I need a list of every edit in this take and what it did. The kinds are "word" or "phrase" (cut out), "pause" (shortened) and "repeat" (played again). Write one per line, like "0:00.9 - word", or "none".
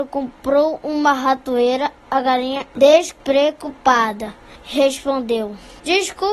none